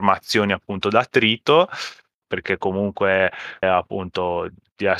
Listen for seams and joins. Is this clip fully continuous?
no; 2 cuts; at 2.2 s, 3.6 s

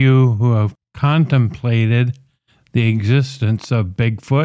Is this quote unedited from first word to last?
yes; 0 cuts

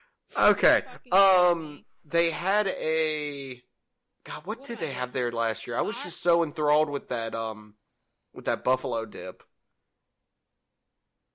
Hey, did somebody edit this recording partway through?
no; 0 cuts

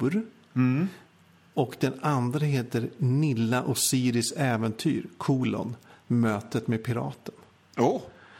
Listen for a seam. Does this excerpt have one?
no; 0 cuts

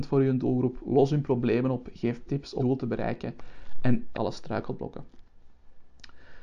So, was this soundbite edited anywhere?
yes; 3 cuts; at 2.3 s, 2.6 s, 4.1 s

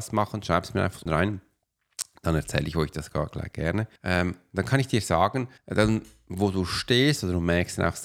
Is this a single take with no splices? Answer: no; 3 cuts; at 1.1 s, 4.0 s, 5.6 s

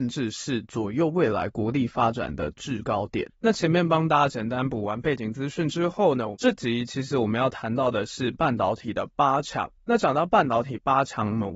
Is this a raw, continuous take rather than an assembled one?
no; 1 cut; at 3.3 s

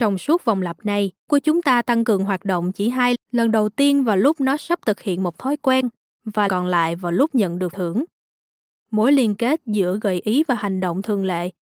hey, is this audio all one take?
no; 4 cuts; at 1.3 s, 3.1 s, 6.5 s, 7.7 s

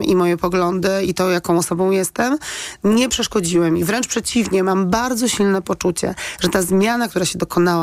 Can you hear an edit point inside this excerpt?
no; 0 cuts

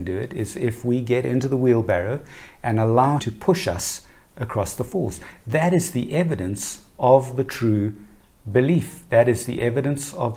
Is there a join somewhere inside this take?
yes; 1 cut; at 3.2 s

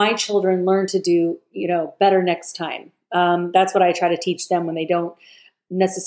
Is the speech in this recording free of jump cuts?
yes; 0 cuts

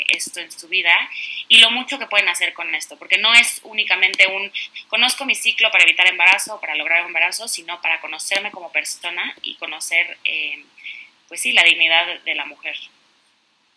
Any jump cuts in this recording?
no; 0 cuts

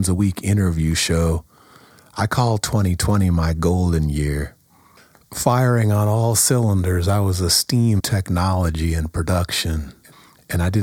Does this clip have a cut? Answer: yes; 1 cut; at 8.0 s

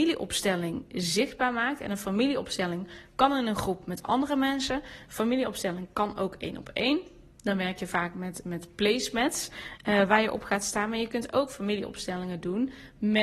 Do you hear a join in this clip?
no; 0 cuts

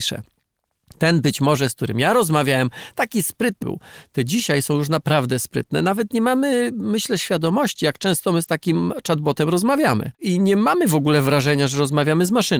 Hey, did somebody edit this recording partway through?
yes; 2 cuts; at 3.6 s, 10.1 s

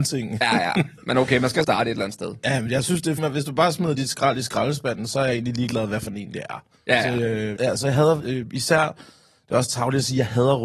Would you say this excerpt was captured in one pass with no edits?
no; 4 cuts; at 1.0 s, 1.6 s, 3.2 s, 7.6 s

